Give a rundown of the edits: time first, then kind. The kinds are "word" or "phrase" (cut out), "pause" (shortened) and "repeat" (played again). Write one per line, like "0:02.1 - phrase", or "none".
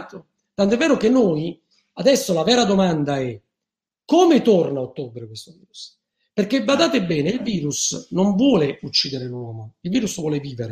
none